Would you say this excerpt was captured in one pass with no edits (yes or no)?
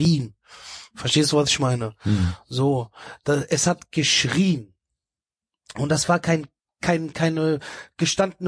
yes